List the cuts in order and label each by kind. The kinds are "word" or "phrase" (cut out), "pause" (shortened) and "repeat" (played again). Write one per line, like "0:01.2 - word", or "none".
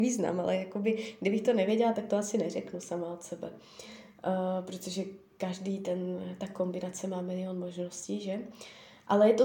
none